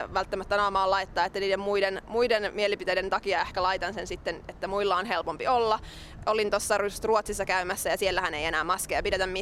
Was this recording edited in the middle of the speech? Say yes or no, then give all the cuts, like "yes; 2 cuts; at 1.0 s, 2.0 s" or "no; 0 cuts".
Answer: no; 0 cuts